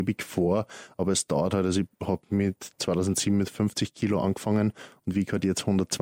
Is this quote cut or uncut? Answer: uncut